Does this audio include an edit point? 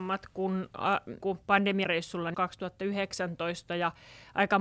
yes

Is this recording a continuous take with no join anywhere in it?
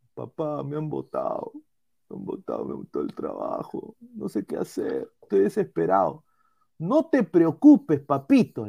yes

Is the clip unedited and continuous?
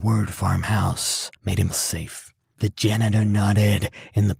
no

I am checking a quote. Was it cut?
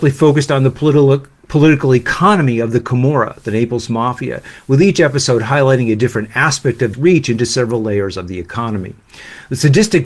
yes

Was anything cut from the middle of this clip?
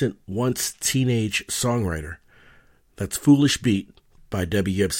no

